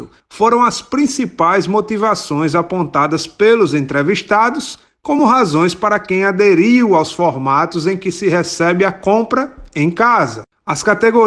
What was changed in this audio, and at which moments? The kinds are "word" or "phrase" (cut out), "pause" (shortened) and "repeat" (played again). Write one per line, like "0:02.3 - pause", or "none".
none